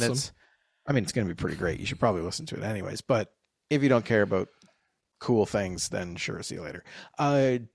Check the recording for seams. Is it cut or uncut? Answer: uncut